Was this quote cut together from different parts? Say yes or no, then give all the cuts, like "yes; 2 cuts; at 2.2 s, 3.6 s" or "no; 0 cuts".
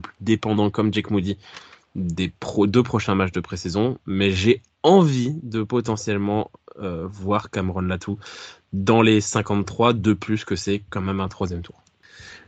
no; 0 cuts